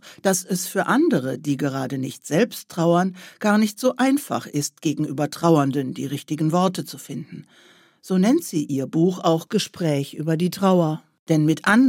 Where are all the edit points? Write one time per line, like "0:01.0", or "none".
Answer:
none